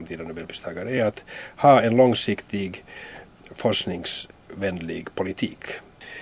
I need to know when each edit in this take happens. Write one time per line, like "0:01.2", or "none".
none

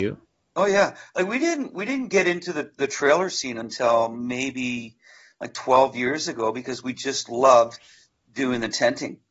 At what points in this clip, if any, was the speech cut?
none

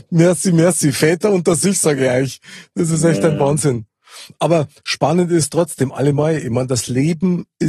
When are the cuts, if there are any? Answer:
none

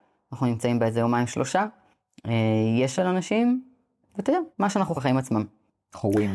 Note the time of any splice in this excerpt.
0:03.0
0:04.5
0:05.0

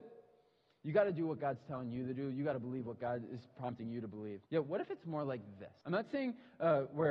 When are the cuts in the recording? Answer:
0:04.5
0:05.8

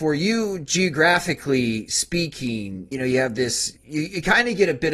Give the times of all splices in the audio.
0:02.9
0:03.8

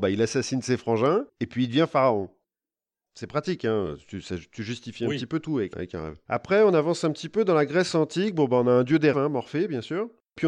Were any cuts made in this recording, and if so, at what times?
0:05.7
0:09.1

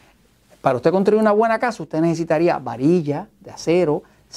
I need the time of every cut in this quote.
none

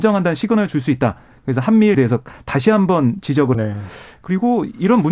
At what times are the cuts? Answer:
0:01.9
0:03.5

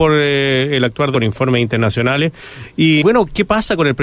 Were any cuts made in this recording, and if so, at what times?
0:01.1
0:03.0

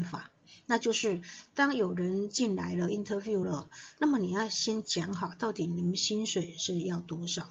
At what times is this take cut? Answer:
none

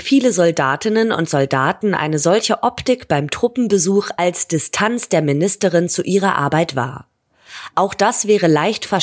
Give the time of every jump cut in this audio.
none

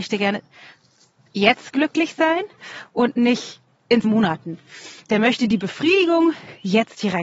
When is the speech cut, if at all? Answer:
0:04.0

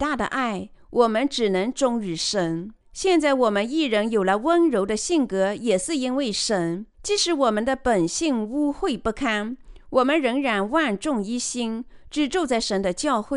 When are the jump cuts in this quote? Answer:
0:02.8
0:06.9

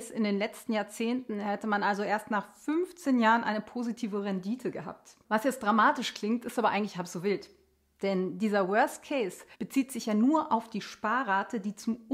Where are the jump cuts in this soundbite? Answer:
0:09.5

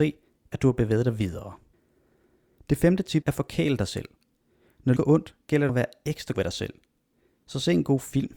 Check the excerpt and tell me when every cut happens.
0:03.2
0:05.0
0:05.7
0:06.3

